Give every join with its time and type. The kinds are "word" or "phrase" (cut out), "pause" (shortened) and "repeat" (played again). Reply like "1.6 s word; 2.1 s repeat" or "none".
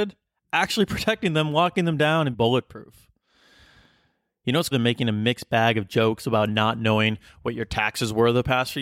2.3 s word; 4.7 s word